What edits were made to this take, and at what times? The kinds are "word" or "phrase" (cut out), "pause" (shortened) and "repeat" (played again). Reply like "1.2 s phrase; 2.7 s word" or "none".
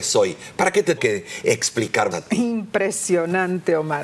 1.0 s word; 2.1 s word